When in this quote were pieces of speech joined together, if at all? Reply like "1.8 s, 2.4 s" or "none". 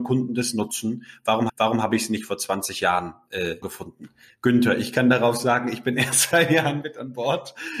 1.5 s, 3.6 s, 6.3 s